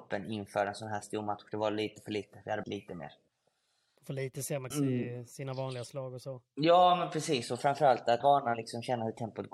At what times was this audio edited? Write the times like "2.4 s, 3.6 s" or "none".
2.6 s, 4.7 s, 8.2 s